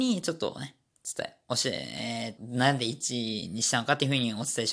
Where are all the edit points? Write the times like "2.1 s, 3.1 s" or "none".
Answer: 2.4 s